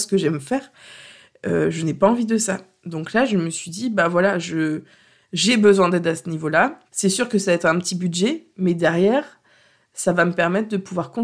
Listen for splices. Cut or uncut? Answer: cut